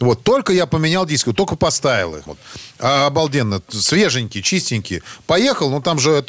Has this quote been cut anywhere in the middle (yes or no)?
yes